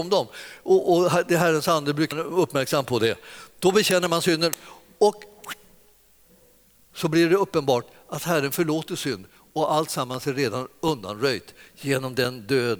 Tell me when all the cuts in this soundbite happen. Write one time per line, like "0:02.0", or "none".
0:02.1